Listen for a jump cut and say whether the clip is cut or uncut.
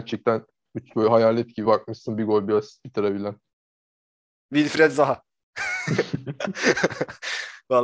cut